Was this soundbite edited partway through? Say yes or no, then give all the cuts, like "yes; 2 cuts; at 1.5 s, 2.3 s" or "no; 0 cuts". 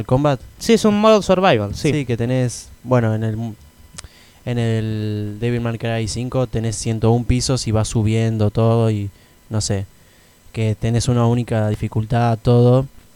no; 0 cuts